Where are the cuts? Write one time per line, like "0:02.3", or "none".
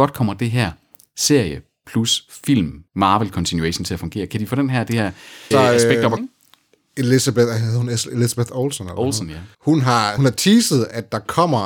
0:02.9
0:05.5
0:06.2
0:09.5
0:10.2